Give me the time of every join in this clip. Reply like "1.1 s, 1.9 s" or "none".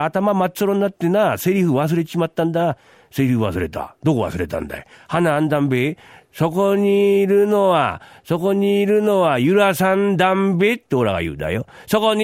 none